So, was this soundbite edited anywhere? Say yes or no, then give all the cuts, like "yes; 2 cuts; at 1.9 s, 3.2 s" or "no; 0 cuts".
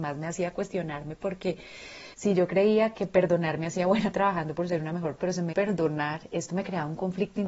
yes; 5 cuts; at 2.1 s, 2.9 s, 4.1 s, 5.2 s, 5.5 s